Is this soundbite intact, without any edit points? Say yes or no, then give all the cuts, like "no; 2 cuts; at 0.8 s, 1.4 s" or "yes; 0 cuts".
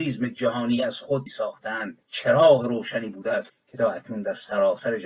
no; 3 cuts; at 1.3 s, 2.0 s, 3.5 s